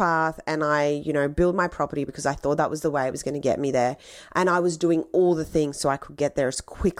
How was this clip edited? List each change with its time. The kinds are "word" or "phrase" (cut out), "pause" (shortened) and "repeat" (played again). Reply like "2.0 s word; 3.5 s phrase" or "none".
2.1 s word

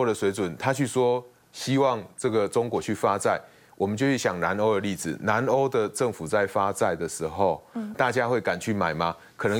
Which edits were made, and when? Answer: 7.9 s word

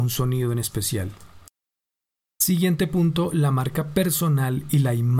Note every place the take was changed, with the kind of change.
none

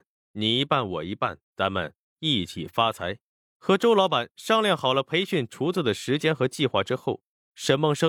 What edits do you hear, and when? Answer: 1.4 s pause; 3.4 s pause

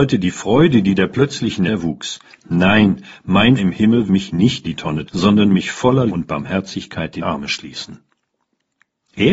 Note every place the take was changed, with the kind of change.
1.7 s word; 3.6 s word; 4.1 s word; 4.6 s word; 5.1 s word; 6.1 s word; 7.2 s word

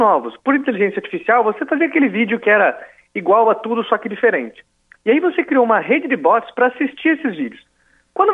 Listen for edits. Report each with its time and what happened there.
none

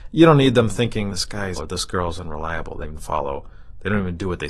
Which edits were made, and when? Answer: 1.1 s word; 1.6 s word; 2.8 s word

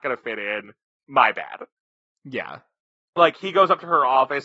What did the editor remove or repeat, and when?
none

